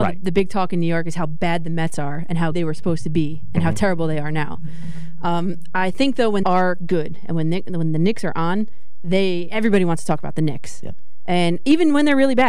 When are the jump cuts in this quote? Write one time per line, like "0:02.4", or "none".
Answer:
0:02.5
0:06.4